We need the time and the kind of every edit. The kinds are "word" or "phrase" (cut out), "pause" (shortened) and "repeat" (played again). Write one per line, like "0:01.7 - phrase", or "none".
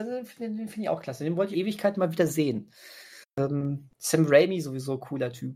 0:01.5 - phrase
0:03.2 - pause